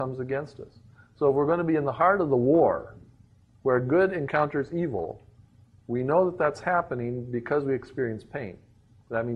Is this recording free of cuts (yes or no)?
yes